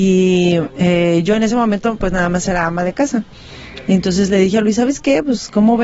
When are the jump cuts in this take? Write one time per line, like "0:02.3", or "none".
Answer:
none